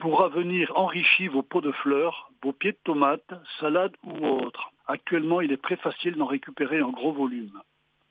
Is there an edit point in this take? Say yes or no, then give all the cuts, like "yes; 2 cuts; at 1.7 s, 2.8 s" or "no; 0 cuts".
yes; 1 cut; at 4.8 s